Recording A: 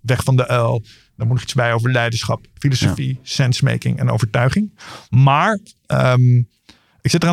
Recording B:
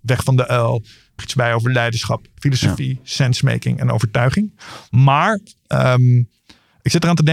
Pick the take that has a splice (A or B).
B